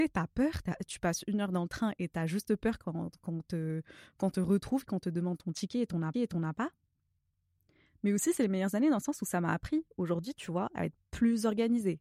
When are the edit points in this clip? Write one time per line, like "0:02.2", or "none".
0:06.1
0:11.0